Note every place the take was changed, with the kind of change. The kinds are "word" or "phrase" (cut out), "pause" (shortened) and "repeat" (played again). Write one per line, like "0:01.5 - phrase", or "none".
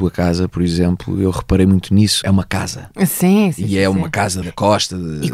0:02.2 - word
0:03.5 - word
0:04.4 - word